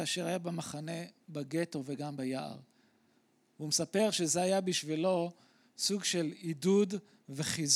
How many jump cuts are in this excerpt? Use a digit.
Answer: 0